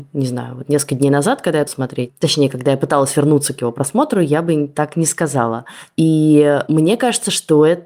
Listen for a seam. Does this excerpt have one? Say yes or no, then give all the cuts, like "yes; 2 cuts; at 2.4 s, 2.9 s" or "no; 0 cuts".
yes; 1 cut; at 1.7 s